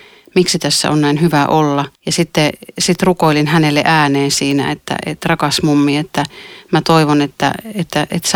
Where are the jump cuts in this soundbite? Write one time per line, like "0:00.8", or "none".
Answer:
0:01.9